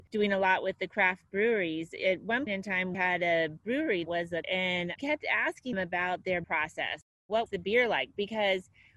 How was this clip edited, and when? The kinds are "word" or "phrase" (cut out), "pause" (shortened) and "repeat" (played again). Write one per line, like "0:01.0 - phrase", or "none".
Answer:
0:02.5 - word
0:02.9 - word
0:04.1 - word
0:04.4 - word
0:05.0 - word
0:05.7 - word
0:06.4 - word
0:07.5 - word